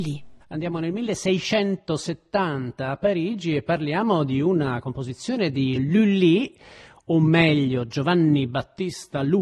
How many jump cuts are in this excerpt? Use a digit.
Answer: 1